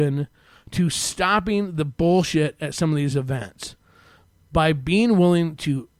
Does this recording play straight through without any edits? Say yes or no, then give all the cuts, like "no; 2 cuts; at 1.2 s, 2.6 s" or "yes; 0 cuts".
yes; 0 cuts